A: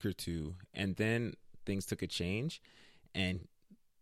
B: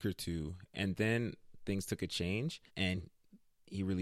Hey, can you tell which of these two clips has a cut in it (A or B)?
B